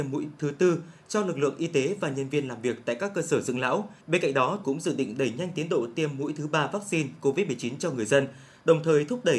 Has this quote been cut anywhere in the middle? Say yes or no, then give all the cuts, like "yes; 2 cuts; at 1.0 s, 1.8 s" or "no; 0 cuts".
yes; 2 cuts; at 4.0 s, 4.6 s